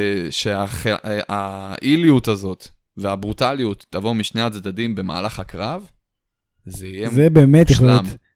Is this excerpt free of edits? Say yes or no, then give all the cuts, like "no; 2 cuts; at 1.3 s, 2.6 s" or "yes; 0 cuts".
yes; 0 cuts